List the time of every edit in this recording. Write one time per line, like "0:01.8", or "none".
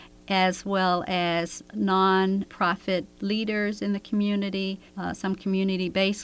0:02.5
0:04.9